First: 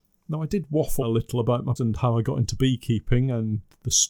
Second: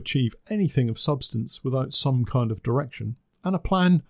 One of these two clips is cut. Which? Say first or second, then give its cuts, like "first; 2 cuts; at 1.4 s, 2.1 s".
first; 2 cuts; at 1.0 s, 1.8 s